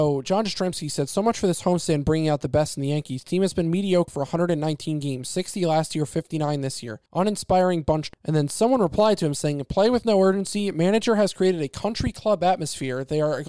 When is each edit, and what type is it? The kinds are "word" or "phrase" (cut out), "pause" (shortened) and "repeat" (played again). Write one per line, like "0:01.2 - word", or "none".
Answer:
0:04.1 - word
0:07.1 - pause
0:08.1 - word